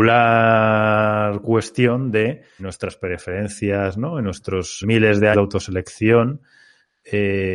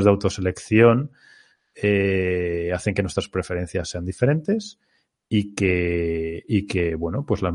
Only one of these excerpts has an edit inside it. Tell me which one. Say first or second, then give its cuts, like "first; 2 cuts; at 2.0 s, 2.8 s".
first; 3 cuts; at 2.6 s, 4.8 s, 5.3 s